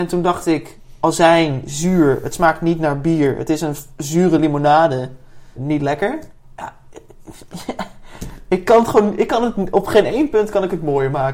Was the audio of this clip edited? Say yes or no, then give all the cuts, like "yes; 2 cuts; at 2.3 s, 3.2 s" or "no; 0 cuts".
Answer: no; 0 cuts